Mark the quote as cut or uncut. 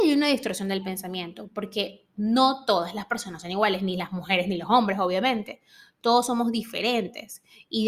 uncut